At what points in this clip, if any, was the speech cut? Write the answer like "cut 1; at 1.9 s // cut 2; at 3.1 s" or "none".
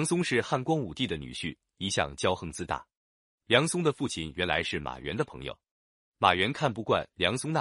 none

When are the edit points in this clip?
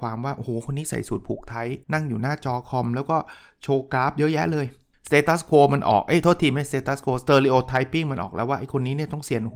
cut 1; at 1.8 s // cut 2; at 4.9 s

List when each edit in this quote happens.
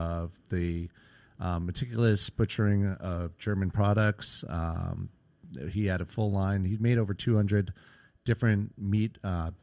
none

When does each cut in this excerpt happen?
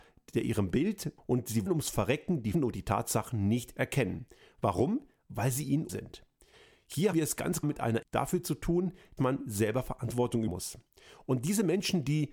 cut 1; at 1.2 s // cut 2; at 1.7 s // cut 3; at 2.5 s // cut 4; at 5.9 s // cut 5; at 7.1 s // cut 6; at 7.6 s // cut 7; at 8.0 s // cut 8; at 9.2 s // cut 9; at 10.5 s

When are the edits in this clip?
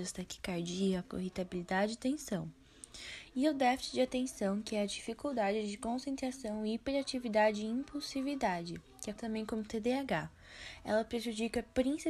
cut 1; at 1.1 s // cut 2; at 9.2 s

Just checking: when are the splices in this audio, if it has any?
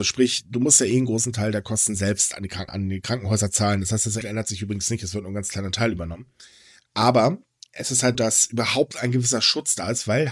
cut 1; at 2.7 s // cut 2; at 4.2 s // cut 3; at 7.6 s // cut 4; at 8.1 s

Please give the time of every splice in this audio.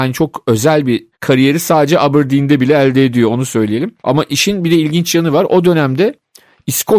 cut 1; at 1.1 s // cut 2; at 4.0 s

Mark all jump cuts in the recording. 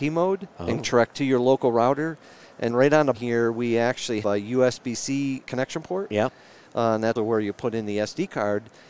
cut 1; at 1.1 s // cut 2; at 2.7 s // cut 3; at 3.1 s // cut 4; at 4.2 s // cut 5; at 5.4 s // cut 6; at 7.2 s

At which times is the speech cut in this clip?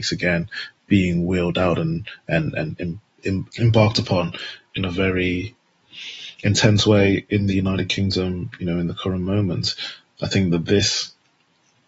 none

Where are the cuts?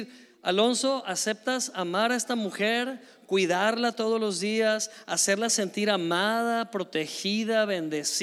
none

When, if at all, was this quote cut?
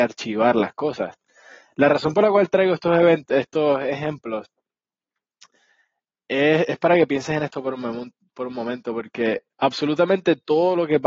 cut 1; at 9.5 s

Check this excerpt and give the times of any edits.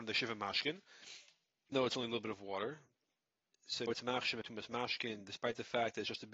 cut 1; at 1.7 s // cut 2; at 3.9 s // cut 3; at 4.4 s

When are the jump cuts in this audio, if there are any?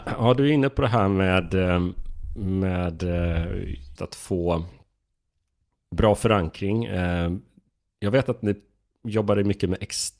cut 1; at 4.0 s

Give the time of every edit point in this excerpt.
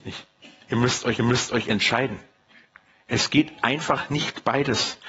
cut 1; at 1.2 s

